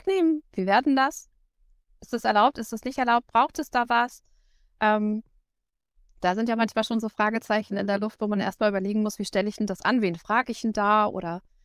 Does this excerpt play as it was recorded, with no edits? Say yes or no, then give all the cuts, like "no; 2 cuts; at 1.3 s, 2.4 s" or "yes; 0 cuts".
yes; 0 cuts